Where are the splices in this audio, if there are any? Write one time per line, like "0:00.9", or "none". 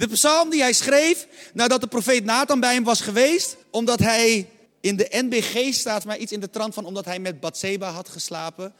0:03.6
0:04.7
0:06.0